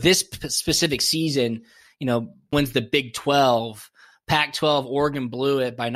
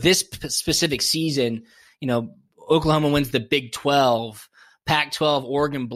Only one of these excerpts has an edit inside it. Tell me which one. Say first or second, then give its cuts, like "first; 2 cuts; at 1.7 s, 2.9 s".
first; 1 cut; at 2.5 s